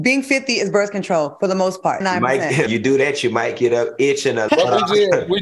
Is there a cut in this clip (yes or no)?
yes